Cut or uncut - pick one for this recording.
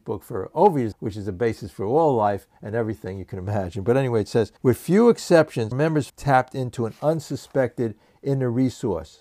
cut